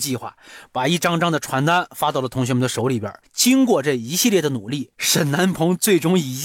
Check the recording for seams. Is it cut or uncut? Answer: cut